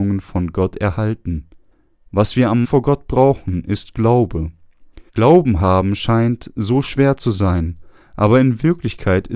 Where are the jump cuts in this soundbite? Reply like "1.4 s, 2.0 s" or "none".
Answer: 1.7 s, 2.6 s, 5.1 s